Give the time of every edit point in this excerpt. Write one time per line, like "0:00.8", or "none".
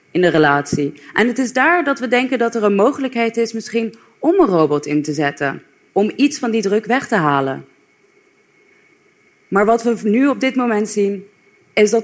none